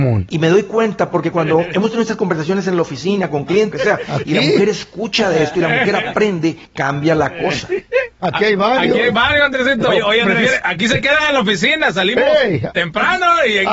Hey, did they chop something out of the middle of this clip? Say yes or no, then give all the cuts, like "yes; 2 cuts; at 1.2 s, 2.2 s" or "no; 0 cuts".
yes; 4 cuts; at 1.3 s, 3.7 s, 6.7 s, 8.1 s